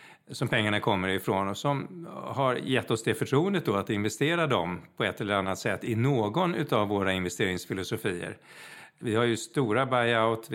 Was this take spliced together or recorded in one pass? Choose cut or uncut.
uncut